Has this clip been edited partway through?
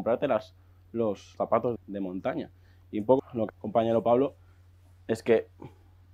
yes; 4 cuts; at 1.4 s, 1.8 s, 3.2 s, 3.5 s

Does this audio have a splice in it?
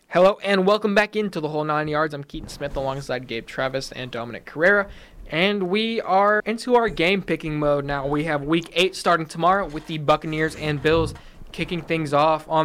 yes; 1 cut; at 6.4 s

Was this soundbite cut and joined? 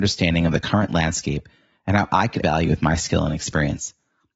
yes; 1 cut; at 2.4 s

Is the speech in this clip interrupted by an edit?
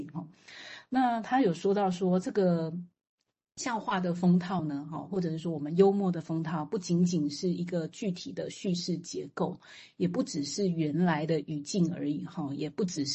no; 0 cuts

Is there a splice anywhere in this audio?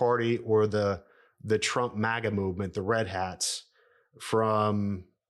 no; 0 cuts

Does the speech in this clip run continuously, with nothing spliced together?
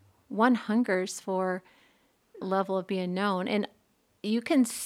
no; 1 cut; at 2.4 s

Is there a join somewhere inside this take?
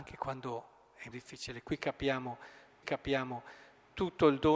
yes; 2 cuts; at 1.1 s, 2.8 s

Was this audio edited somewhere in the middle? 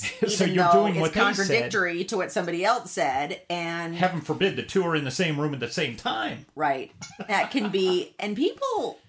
yes; 2 cuts; at 7.3 s, 8.2 s

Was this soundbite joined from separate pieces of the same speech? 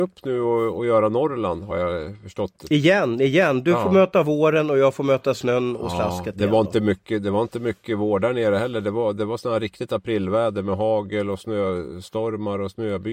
no; 0 cuts

